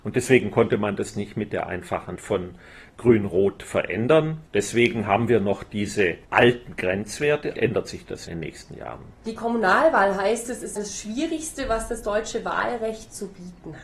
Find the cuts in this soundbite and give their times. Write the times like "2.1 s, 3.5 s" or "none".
1.1 s, 2.2 s, 4.5 s, 6.2 s, 7.5 s, 8.3 s, 9.1 s, 10.8 s